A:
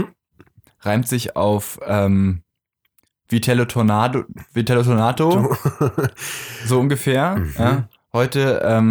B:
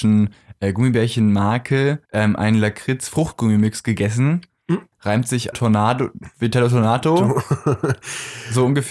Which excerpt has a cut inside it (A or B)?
B